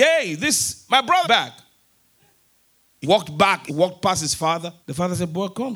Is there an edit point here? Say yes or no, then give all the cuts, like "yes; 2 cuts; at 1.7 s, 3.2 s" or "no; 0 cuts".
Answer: yes; 4 cuts; at 1.2 s, 3.0 s, 3.7 s, 4.8 s